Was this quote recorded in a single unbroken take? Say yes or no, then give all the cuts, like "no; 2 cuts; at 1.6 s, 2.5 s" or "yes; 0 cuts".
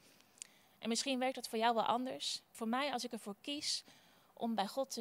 no; 1 cut; at 2.5 s